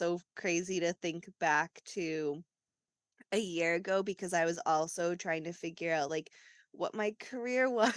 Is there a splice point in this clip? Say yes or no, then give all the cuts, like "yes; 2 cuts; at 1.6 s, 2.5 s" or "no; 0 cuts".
no; 0 cuts